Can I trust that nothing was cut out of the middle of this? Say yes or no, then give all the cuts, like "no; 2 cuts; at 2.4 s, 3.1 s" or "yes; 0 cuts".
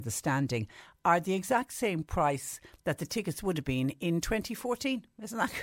yes; 0 cuts